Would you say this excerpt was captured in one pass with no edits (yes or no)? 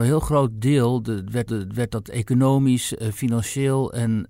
no